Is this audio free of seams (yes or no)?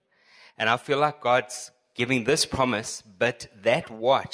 yes